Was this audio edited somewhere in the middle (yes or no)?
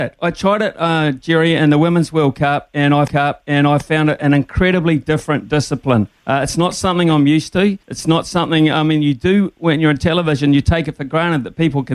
yes